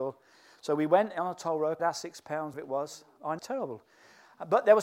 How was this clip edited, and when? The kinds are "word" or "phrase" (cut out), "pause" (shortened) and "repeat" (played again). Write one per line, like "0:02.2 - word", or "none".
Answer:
0:01.8 - word
0:02.5 - word
0:03.4 - word